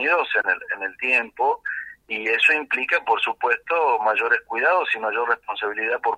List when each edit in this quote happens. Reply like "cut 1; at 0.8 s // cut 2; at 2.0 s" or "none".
none